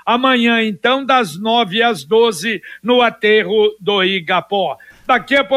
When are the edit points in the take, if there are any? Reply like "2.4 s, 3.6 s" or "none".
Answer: none